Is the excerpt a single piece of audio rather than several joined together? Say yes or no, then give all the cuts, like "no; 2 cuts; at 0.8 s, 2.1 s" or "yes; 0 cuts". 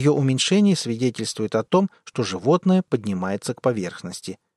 yes; 0 cuts